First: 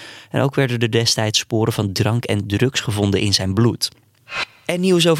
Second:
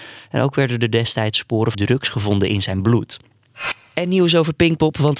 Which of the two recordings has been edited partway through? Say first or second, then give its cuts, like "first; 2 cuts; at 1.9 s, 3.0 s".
second; 1 cut; at 1.7 s